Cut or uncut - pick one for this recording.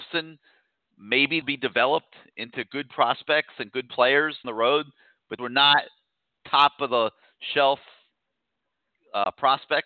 cut